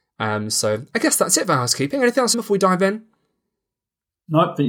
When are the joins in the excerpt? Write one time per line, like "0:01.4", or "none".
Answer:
0:02.3